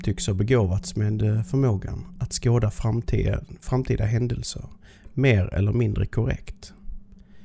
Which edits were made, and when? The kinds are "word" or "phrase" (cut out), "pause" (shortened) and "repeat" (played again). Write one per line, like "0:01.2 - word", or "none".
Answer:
none